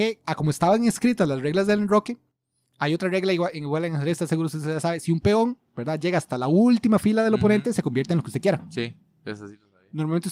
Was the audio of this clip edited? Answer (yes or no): no